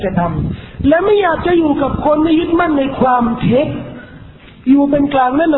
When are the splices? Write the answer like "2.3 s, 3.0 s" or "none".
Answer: none

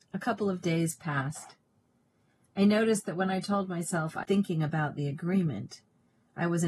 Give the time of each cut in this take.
4.2 s

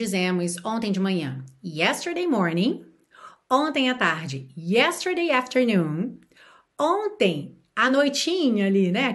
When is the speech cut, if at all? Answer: none

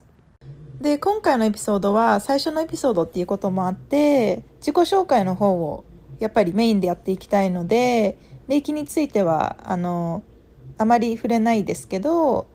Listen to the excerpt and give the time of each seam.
4.5 s

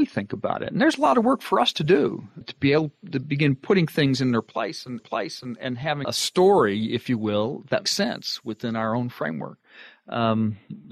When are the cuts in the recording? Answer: 2.4 s, 5.0 s, 6.0 s, 7.9 s

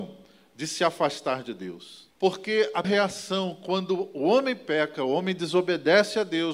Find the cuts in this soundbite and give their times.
2.1 s, 2.8 s

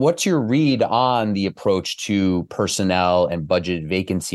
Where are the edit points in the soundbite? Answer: none

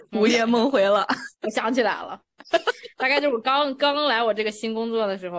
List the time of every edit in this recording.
1.3 s

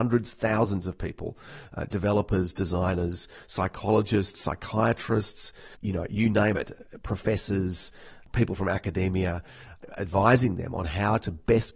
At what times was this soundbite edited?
5.7 s

